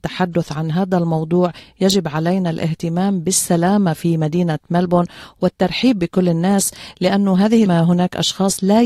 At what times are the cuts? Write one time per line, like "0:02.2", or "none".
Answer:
0:07.7